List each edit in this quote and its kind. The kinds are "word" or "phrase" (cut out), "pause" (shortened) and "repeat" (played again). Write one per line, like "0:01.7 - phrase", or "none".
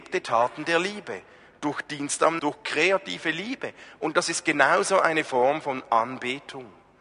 0:02.4 - word